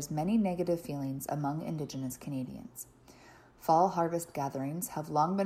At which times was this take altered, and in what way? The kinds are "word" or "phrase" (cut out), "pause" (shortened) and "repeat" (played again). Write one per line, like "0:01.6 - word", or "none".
none